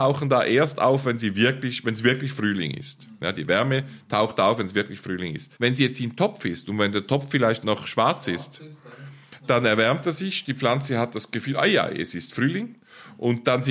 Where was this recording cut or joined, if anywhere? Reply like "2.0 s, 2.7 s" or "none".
5.6 s